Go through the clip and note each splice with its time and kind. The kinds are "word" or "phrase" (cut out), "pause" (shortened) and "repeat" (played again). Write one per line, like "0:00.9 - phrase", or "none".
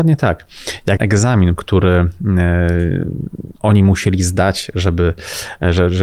0:01.0 - word
0:01.6 - phrase
0:03.5 - pause